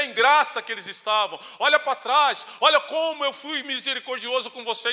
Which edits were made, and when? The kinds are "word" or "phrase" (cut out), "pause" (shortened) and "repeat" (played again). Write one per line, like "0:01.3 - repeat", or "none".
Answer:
none